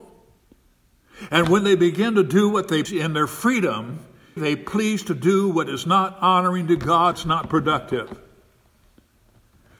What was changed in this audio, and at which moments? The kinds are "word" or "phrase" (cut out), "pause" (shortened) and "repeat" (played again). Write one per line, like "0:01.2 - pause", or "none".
0:02.8 - word
0:04.4 - word
0:07.1 - word